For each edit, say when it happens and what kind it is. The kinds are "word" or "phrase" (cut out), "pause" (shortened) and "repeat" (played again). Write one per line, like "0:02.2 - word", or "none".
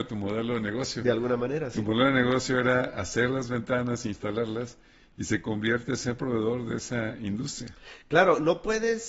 none